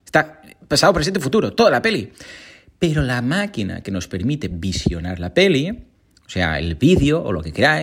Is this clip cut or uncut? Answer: uncut